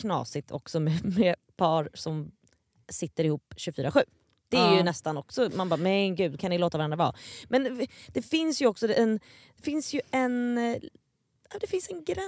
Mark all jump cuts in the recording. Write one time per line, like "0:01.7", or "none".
none

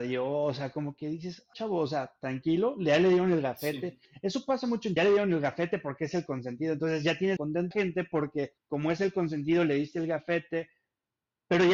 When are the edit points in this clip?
0:01.5
0:04.0
0:05.0
0:07.4
0:07.7
0:08.6

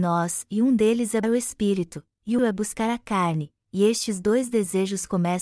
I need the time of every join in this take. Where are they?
0:01.2
0:02.4

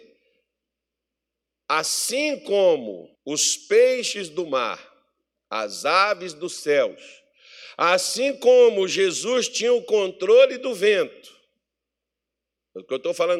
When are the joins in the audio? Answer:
0:03.1

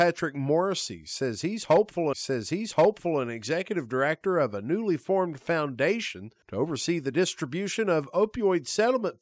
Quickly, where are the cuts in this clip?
0:02.1

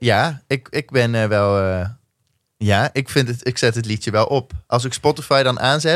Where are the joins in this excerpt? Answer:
none

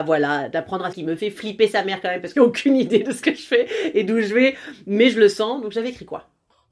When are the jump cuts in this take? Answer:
0:00.9
0:02.3

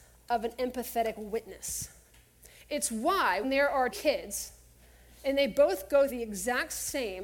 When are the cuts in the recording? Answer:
0:03.4
0:03.9
0:06.1

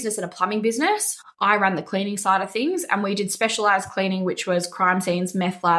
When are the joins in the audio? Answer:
none

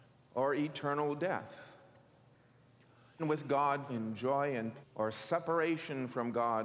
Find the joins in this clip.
0:03.2
0:03.9
0:04.8

